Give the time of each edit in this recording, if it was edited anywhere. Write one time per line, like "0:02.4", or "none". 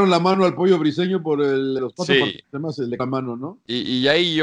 0:01.8
0:02.4
0:03.0